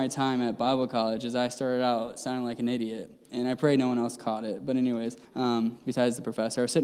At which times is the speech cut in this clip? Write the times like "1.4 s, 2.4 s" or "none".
5.2 s